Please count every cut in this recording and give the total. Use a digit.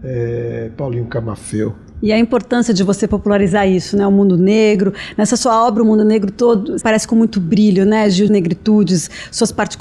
2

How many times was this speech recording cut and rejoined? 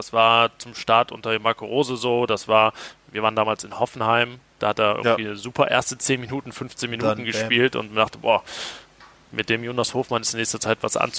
0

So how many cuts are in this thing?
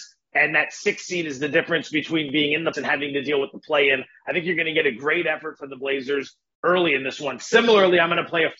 1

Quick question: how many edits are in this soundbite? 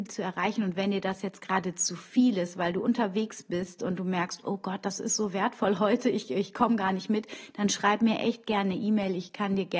0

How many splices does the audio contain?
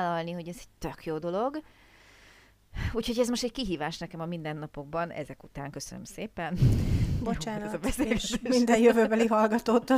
0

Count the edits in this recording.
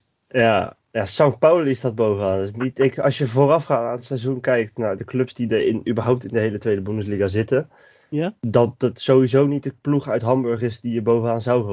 1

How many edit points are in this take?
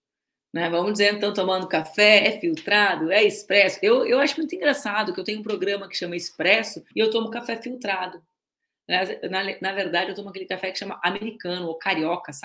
1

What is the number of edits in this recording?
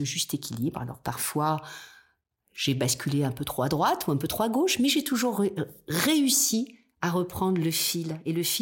0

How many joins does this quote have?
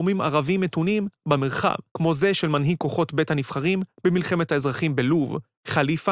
1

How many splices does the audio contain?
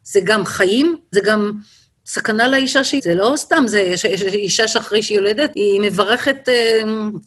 3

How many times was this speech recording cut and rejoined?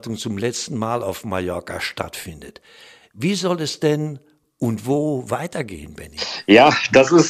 0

